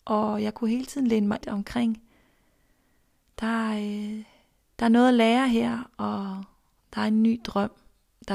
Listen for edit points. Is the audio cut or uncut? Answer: cut